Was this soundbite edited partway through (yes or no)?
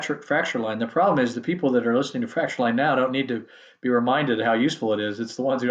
no